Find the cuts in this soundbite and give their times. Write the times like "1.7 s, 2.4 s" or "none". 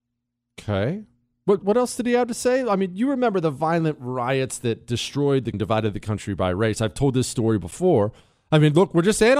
1.6 s, 5.5 s